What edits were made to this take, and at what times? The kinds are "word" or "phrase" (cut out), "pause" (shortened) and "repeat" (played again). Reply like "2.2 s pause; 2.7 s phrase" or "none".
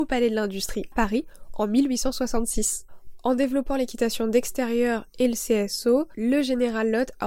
0.9 s word